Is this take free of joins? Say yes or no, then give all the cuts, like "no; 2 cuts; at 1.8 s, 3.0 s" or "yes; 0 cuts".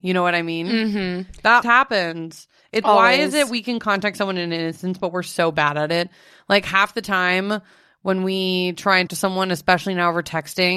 no; 3 cuts; at 1.6 s, 2.8 s, 9.1 s